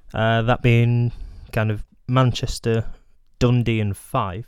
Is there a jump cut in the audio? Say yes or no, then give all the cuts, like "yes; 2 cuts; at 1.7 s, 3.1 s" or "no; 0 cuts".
yes; 1 cut; at 3.1 s